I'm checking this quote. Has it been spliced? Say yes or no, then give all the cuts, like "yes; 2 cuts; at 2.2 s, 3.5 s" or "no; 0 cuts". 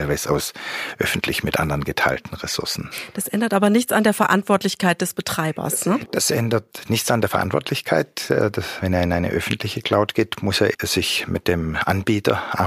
yes; 1 cut; at 10.7 s